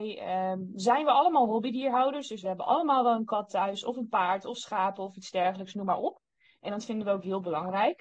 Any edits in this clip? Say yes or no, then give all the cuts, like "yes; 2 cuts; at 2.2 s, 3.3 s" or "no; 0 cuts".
no; 0 cuts